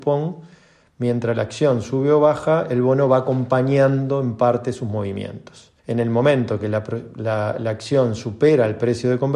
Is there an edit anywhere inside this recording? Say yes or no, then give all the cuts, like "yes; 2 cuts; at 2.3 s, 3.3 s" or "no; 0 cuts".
yes; 1 cut; at 5.8 s